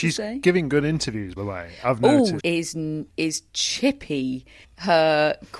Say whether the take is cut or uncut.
cut